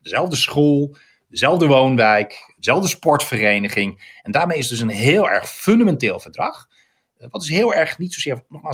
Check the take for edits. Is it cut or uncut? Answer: uncut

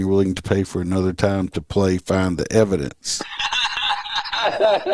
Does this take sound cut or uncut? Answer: uncut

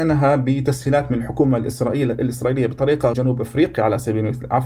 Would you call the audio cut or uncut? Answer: cut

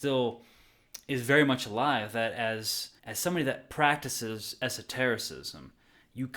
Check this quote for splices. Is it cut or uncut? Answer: cut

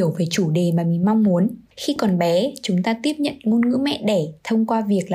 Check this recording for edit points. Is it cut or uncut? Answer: cut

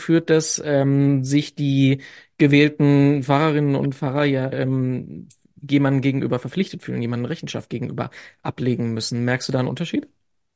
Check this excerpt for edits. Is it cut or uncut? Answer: uncut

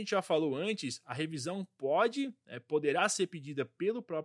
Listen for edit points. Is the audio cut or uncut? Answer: uncut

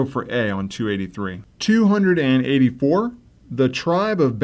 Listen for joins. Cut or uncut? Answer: uncut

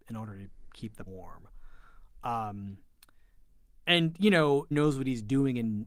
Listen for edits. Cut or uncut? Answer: cut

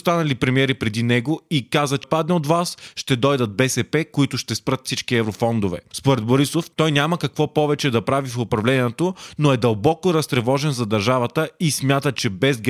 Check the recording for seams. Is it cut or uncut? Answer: cut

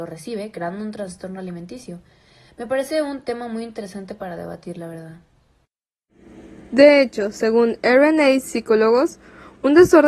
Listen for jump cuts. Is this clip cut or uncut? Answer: uncut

